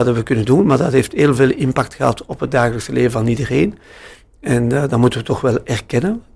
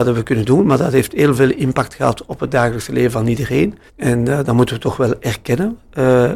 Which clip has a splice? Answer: second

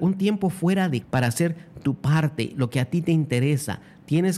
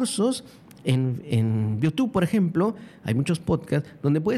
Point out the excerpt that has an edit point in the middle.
first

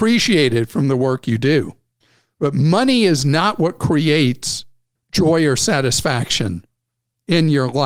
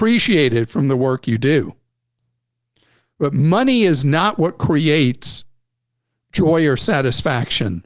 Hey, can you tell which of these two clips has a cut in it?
first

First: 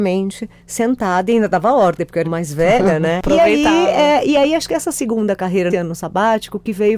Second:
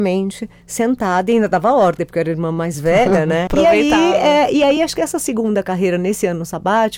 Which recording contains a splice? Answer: first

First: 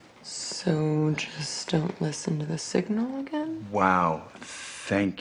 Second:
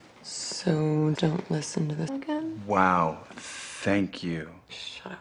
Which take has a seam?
second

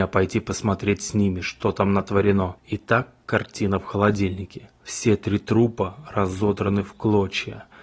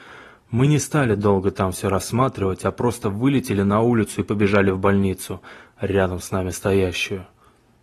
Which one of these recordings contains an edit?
first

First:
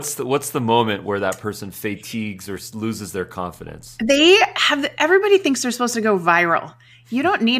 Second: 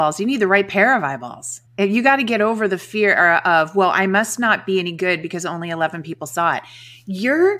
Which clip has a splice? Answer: second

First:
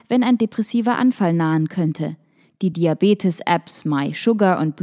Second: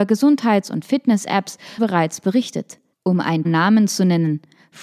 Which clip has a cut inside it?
second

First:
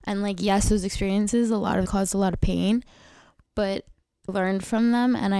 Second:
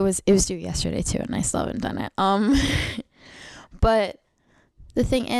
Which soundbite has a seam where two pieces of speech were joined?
first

